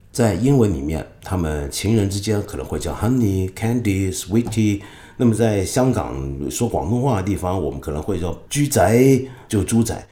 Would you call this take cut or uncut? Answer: cut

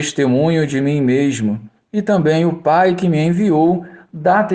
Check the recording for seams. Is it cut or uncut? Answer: uncut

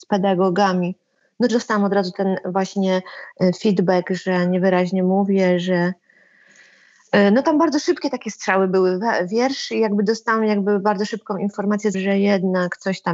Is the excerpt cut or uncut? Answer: cut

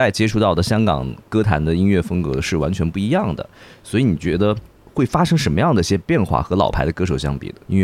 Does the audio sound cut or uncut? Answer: uncut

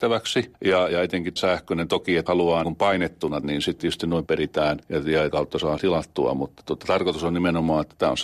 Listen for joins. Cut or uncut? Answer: cut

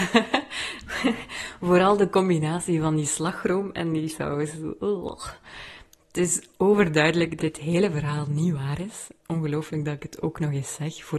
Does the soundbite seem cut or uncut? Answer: cut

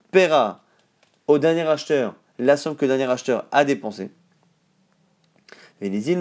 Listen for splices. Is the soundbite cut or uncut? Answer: uncut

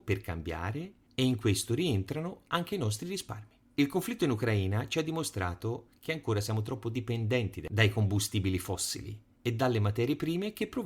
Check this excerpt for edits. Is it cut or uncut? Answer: cut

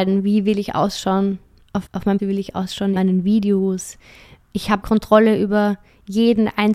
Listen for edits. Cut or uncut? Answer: cut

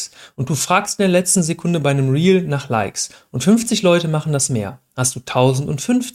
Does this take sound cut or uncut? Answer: uncut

